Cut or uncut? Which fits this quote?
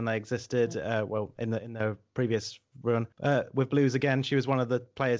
cut